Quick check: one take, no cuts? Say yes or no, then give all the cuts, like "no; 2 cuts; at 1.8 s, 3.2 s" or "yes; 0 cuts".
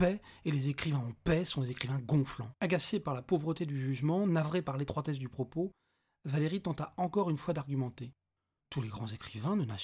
no; 1 cut; at 2.6 s